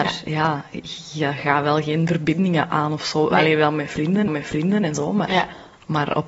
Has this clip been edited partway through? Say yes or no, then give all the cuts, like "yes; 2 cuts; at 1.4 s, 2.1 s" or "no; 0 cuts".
yes; 1 cut; at 4.3 s